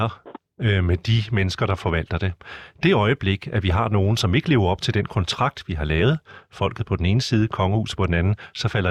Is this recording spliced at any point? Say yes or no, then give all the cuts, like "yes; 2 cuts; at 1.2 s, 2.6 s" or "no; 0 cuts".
no; 0 cuts